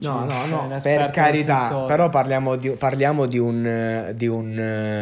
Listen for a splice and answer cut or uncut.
uncut